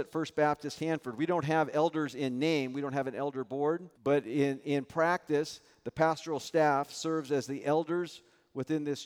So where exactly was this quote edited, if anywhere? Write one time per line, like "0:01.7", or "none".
0:03.9